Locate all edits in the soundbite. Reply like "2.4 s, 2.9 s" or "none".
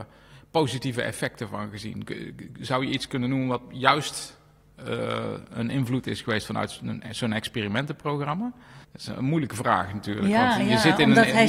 8.8 s